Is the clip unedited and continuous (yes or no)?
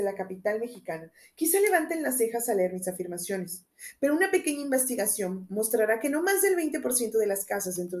yes